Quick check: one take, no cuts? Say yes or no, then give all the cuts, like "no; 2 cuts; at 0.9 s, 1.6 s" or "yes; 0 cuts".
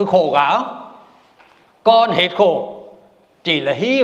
yes; 0 cuts